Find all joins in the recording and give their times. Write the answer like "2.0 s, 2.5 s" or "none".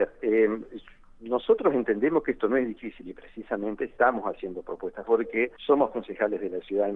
5.0 s, 5.6 s